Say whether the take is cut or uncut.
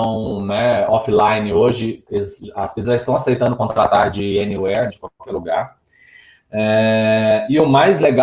cut